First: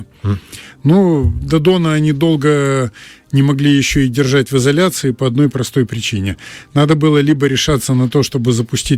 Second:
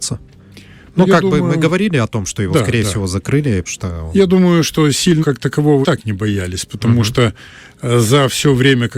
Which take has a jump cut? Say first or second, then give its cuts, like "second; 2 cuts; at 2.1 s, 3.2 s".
second; 3 cuts; at 3.7 s, 5.2 s, 5.8 s